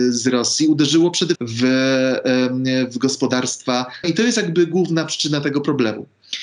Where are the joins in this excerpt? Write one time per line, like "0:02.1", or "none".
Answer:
0:01.3
0:04.0